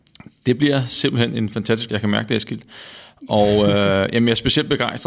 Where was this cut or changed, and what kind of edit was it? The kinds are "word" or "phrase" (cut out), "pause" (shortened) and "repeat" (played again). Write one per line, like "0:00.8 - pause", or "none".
0:01.9 - word